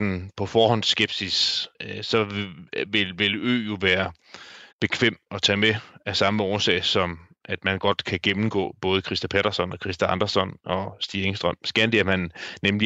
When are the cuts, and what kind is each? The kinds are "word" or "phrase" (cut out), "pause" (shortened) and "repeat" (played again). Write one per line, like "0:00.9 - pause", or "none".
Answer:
0:01.7 - pause
0:04.7 - pause

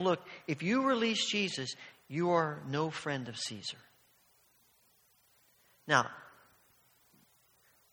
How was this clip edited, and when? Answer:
none

